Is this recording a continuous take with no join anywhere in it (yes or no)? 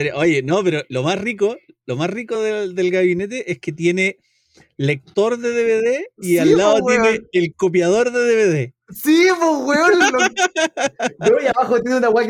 yes